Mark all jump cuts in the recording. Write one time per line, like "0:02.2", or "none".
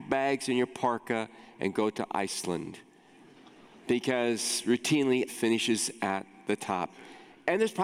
0:05.3